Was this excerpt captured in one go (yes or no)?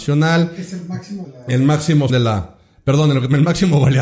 no